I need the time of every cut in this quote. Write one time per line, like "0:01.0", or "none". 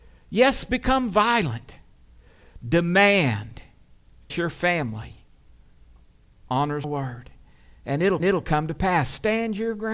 0:04.3
0:06.8
0:08.2